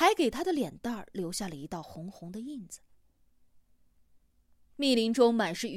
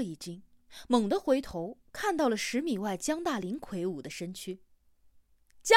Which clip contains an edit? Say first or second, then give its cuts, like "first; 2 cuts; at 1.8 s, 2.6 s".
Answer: second; 1 cut; at 1.9 s